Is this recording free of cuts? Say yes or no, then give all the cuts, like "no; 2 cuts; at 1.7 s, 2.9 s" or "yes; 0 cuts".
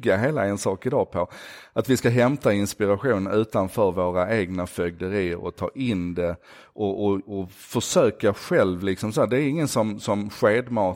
yes; 0 cuts